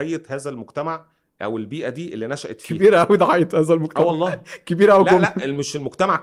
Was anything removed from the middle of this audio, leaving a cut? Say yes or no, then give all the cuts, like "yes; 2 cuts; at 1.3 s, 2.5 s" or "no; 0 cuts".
no; 0 cuts